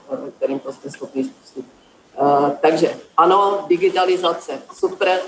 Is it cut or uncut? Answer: uncut